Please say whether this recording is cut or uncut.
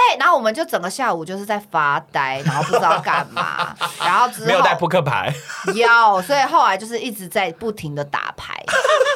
uncut